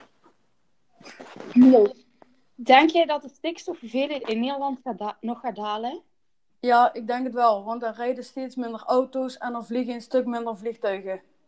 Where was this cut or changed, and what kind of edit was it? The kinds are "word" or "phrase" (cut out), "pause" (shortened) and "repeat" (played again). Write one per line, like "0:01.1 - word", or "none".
none